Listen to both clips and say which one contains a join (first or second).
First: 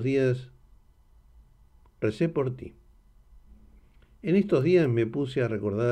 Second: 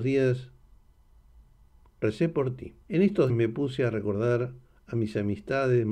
second